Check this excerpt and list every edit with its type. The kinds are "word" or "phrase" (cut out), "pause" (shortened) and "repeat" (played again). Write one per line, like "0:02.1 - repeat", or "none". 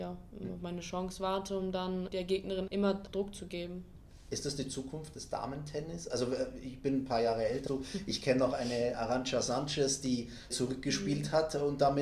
0:02.1 - word
0:02.7 - word
0:03.1 - word
0:07.7 - word
0:08.9 - word
0:10.5 - word